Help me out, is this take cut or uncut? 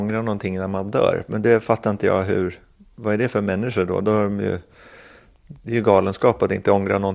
uncut